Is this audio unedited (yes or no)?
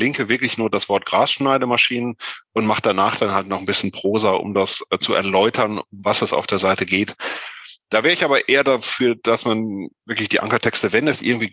yes